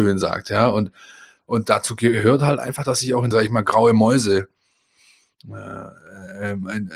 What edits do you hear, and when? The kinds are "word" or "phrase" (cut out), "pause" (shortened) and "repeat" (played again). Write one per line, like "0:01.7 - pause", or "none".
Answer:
0:03.3 - phrase